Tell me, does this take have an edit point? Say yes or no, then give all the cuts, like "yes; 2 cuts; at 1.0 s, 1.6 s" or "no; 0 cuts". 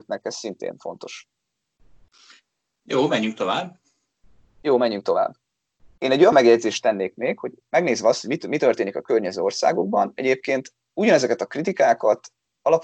no; 0 cuts